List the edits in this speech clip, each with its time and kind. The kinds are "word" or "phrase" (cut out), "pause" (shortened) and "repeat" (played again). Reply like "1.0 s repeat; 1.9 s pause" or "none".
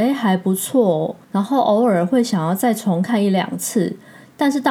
1.2 s pause